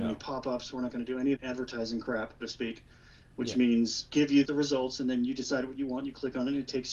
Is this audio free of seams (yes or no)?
no